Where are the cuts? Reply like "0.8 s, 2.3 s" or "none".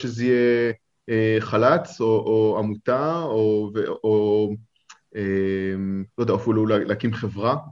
6.1 s